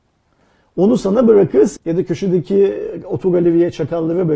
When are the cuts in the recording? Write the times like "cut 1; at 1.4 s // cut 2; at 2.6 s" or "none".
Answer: cut 1; at 1.8 s